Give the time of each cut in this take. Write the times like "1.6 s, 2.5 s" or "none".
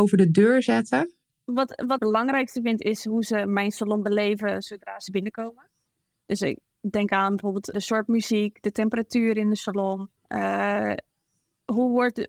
2.0 s, 7.7 s, 10.2 s